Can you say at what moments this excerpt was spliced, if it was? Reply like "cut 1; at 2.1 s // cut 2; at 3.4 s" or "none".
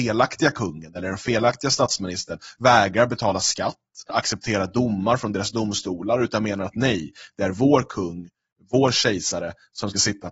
cut 1; at 4.1 s

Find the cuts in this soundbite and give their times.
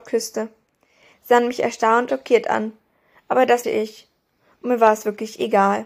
cut 1; at 2.1 s // cut 2; at 3.6 s

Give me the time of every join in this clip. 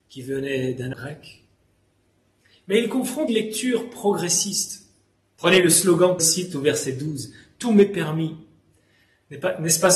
cut 1; at 0.9 s // cut 2; at 3.3 s // cut 3; at 6.2 s

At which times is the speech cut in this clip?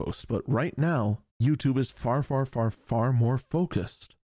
cut 1; at 1.3 s // cut 2; at 2.7 s

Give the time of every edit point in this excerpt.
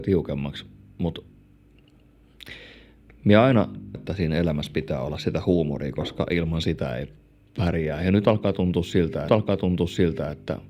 cut 1; at 3.9 s // cut 2; at 7.2 s // cut 3; at 9.3 s

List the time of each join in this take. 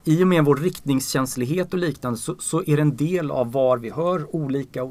none

